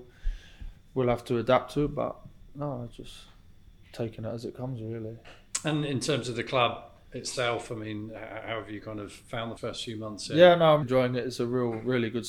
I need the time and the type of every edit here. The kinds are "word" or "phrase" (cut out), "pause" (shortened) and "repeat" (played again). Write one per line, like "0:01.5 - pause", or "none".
0:09.6 - word
0:10.8 - word